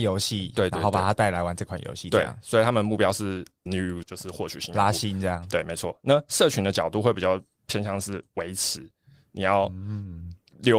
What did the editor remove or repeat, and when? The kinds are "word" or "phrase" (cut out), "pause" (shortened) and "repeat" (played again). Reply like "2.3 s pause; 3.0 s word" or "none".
3.7 s word; 4.0 s word